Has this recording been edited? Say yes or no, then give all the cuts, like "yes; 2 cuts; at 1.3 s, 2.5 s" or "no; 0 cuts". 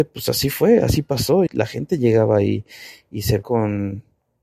yes; 2 cuts; at 1.5 s, 3.4 s